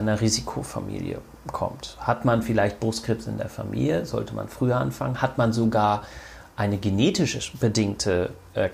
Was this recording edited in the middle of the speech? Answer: no; 0 cuts

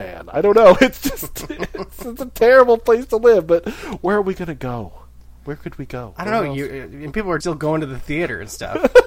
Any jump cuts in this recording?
yes; 1 cut; at 7.4 s

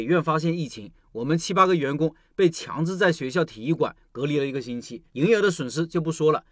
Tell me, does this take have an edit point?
yes; 1 cut; at 5.1 s

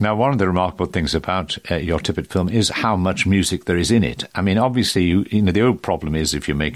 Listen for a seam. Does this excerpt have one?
no; 0 cuts

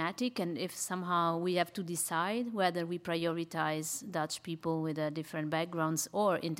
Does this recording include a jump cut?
no; 0 cuts

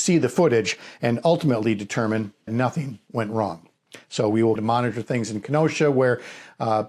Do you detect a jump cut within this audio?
yes; 2 cuts; at 2.5 s, 4.6 s

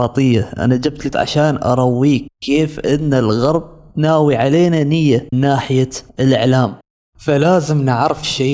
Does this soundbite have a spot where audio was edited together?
yes; 2 cuts; at 1.1 s, 5.3 s

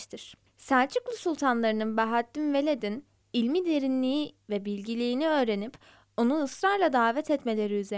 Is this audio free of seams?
yes; 0 cuts

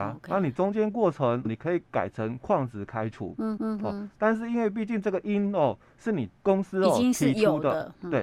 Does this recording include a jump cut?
yes; 3 cuts; at 1.5 s, 3.6 s, 6.4 s

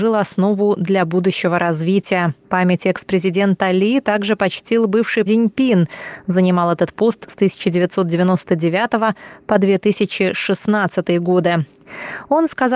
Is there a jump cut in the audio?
yes; 2 cuts; at 2.4 s, 5.3 s

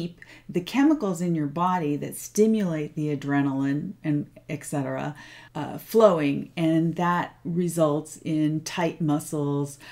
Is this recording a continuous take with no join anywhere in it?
no; 1 cut; at 5.5 s

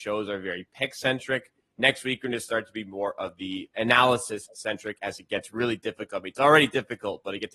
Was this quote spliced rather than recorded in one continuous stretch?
no; 0 cuts

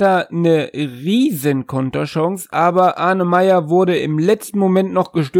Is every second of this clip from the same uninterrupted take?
yes; 0 cuts

